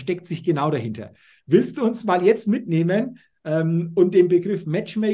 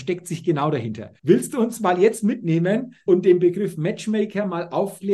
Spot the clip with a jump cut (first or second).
second